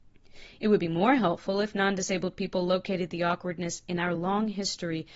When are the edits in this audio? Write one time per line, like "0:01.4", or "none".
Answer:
none